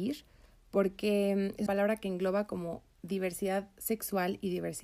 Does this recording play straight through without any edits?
no; 1 cut; at 1.7 s

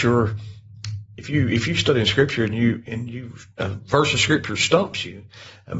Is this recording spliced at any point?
no; 0 cuts

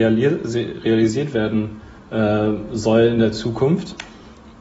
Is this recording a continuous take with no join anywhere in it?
no; 1 cut; at 2.0 s

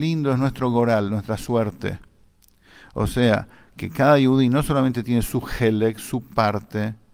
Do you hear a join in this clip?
no; 0 cuts

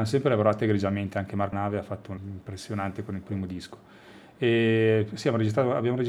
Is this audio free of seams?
no; 2 cuts; at 1.5 s, 2.2 s

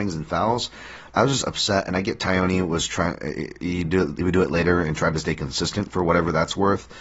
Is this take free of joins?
yes; 0 cuts

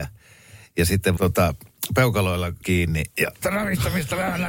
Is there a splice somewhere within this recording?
yes; 3 cuts; at 1.2 s, 2.6 s, 3.4 s

